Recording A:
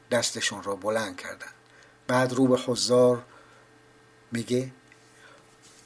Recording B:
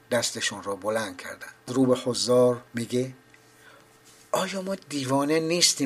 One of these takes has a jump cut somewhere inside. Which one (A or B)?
B